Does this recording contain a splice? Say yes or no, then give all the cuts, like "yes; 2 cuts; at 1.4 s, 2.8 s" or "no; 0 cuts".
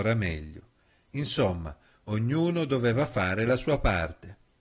no; 0 cuts